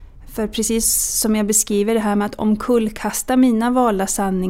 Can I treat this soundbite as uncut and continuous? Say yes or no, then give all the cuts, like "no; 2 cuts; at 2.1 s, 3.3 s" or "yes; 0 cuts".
yes; 0 cuts